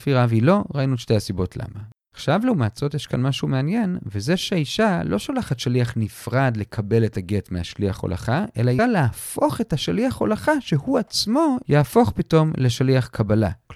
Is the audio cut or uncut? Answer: cut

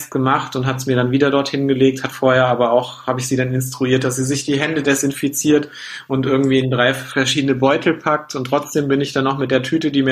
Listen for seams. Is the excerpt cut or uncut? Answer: uncut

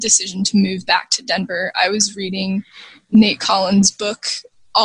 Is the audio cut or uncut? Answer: uncut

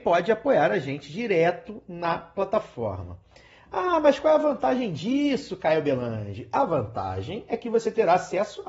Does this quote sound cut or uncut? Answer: uncut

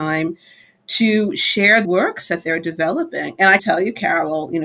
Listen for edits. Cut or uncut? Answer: cut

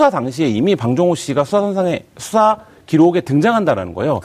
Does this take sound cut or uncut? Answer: uncut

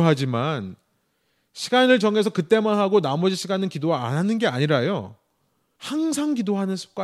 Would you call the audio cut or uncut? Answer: uncut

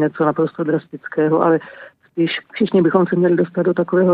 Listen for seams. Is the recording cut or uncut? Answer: cut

